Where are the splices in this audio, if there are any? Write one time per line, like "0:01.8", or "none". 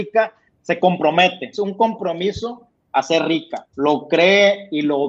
0:01.5
0:03.7